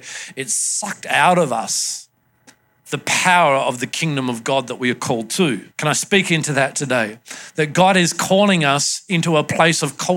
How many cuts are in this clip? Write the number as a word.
one